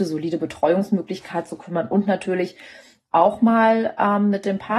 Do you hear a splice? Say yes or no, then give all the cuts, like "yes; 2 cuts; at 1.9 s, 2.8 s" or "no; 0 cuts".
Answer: no; 0 cuts